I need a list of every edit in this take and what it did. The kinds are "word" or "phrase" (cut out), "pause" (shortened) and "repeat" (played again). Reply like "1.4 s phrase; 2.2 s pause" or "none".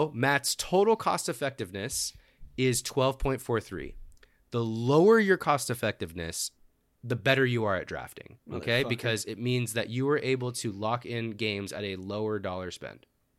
8.4 s pause